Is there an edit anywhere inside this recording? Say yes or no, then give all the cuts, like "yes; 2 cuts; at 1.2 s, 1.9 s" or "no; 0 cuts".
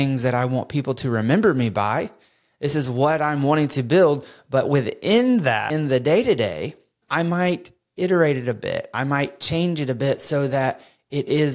no; 0 cuts